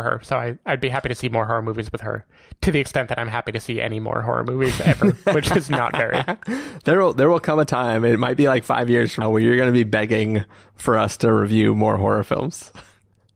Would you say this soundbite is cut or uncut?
cut